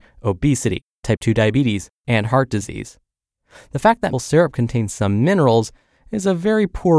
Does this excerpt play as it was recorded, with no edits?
no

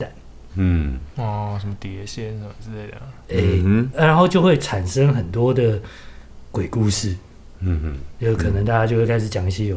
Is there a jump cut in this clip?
yes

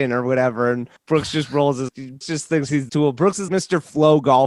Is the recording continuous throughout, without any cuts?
no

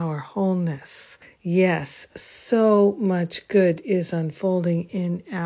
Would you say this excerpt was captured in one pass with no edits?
no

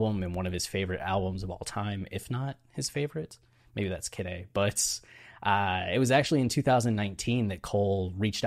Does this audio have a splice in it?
no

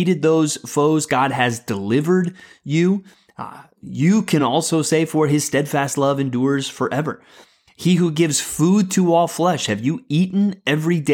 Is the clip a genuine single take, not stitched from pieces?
yes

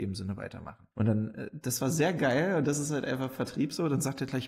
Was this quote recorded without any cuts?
no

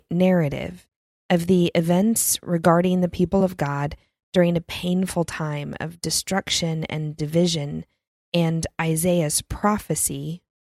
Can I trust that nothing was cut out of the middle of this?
yes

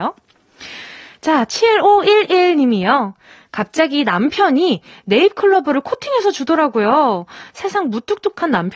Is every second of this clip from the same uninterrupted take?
yes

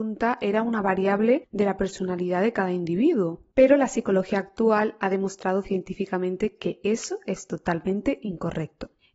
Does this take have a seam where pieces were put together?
no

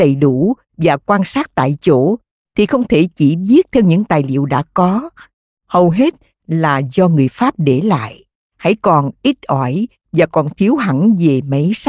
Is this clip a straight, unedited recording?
yes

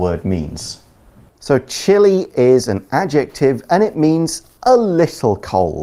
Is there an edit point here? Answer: no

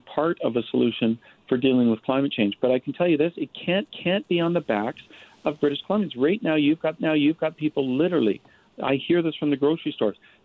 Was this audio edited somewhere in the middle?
yes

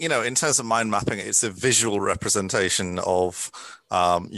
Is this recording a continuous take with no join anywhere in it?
yes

